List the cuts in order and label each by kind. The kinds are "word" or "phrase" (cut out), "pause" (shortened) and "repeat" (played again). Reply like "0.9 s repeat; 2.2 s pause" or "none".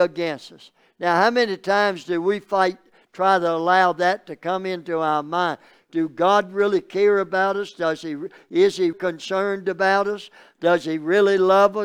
8.9 s word